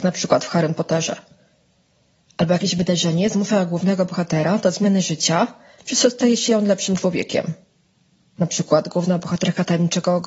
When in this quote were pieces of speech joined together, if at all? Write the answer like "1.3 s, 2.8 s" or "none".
none